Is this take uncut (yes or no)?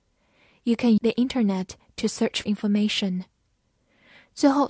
no